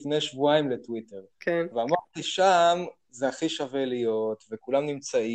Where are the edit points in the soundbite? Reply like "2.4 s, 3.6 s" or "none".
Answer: 1.3 s

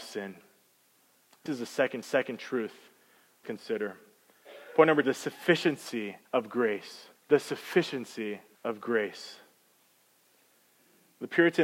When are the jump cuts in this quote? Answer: 1.5 s, 2.0 s, 3.4 s, 5.0 s, 6.2 s, 7.2 s, 8.5 s

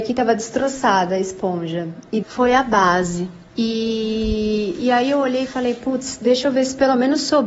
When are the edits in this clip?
2.2 s, 3.5 s

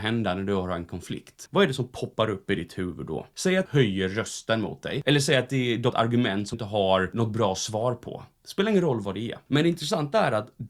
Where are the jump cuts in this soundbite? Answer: 3.7 s, 5.9 s, 6.5 s

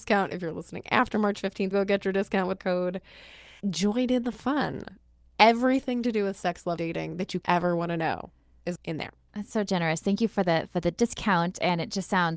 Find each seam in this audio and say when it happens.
1.7 s, 2.6 s, 3.6 s, 6.8 s, 7.4 s, 8.7 s

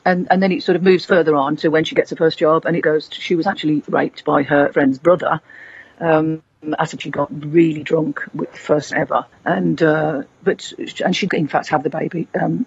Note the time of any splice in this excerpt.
2.8 s, 3.8 s, 4.7 s, 7.0 s, 8.9 s, 9.3 s, 11.3 s

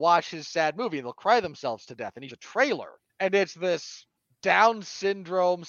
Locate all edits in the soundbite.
2.3 s, 3.1 s, 4.2 s

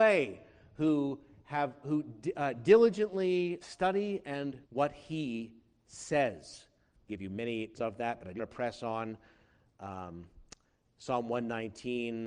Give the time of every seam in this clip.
1.8 s, 3.6 s, 4.6 s, 7.1 s, 7.7 s, 8.4 s

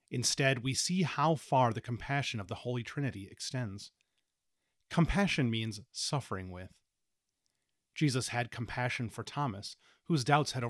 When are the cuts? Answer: none

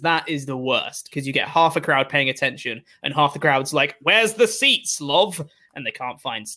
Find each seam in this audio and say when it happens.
none

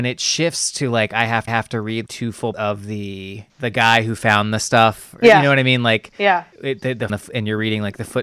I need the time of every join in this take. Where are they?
1.5 s, 2.1 s, 2.5 s, 3.5 s, 6.5 s, 7.1 s

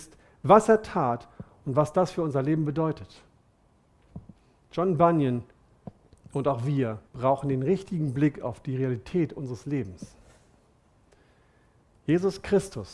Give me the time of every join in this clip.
4.4 s, 6.1 s, 7.1 s

